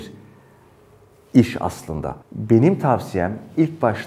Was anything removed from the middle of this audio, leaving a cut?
yes; 1 cut; at 2.2 s

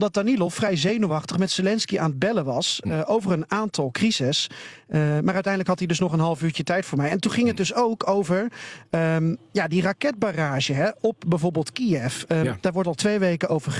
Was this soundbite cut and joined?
no; 0 cuts

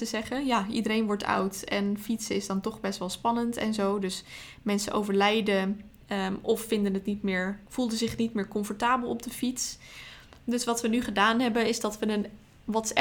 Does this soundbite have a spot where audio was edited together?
yes; 2 cuts; at 6.0 s, 7.7 s

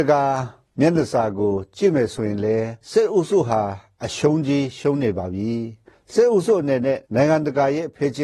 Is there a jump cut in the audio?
yes; 2 cuts; at 2.8 s, 7.0 s

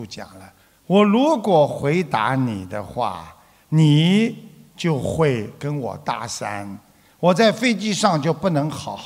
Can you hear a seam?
no; 0 cuts

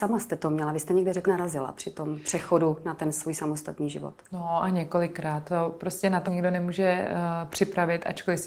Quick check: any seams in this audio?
yes; 2 cuts; at 1.3 s, 6.3 s

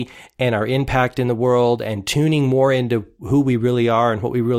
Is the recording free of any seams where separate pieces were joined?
yes; 0 cuts

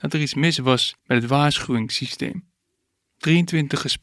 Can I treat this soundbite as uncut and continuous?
no; 1 cut; at 1.0 s

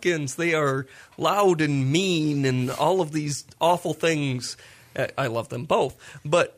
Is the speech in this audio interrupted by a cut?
no; 0 cuts

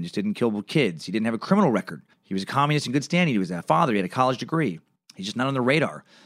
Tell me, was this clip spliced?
yes; 3 cuts; at 2.1 s, 3.6 s, 5.0 s

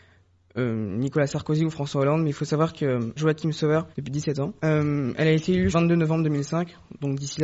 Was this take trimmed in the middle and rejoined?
yes; 4 cuts; at 3.2 s, 3.9 s, 4.6 s, 5.7 s

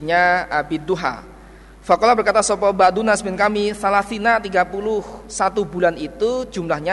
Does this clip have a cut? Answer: no; 0 cuts

